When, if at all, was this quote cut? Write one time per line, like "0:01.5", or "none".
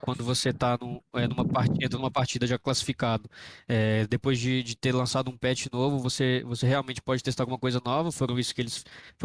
none